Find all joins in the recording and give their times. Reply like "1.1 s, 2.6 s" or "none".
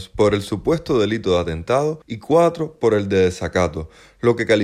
2.0 s